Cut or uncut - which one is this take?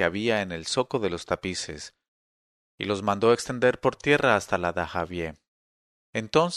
uncut